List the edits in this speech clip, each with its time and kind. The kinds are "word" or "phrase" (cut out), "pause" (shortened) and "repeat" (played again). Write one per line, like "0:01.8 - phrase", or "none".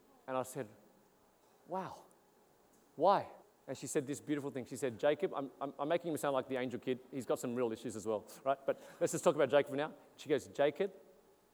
0:03.4 - pause